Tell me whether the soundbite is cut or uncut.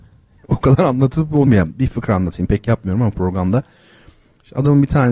cut